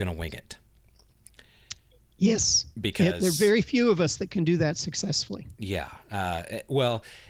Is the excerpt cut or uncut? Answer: uncut